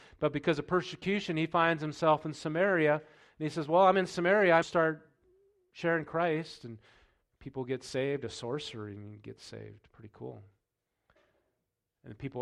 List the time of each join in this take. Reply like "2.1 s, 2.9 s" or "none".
4.6 s